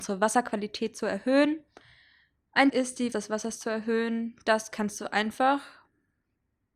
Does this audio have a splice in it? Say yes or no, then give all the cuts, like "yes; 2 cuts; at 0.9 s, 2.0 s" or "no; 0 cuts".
yes; 2 cuts; at 2.7 s, 3.1 s